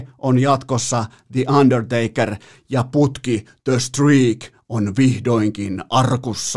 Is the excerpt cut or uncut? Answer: uncut